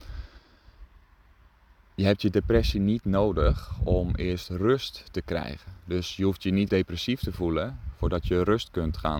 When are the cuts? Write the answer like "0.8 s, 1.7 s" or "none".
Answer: 6.7 s